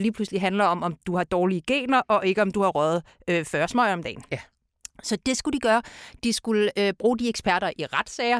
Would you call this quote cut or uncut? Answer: uncut